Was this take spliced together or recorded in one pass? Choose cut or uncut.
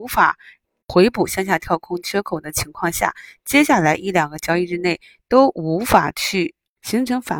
uncut